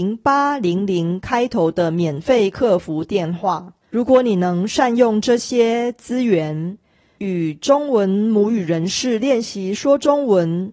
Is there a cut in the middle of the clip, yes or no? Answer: yes